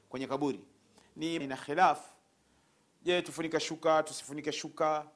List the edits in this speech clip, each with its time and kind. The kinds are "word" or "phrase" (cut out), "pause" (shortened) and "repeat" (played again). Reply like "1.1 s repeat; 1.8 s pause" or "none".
1.4 s word